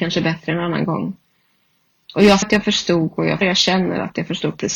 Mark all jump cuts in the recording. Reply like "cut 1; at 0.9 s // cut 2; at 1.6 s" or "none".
cut 1; at 2.4 s // cut 2; at 3.4 s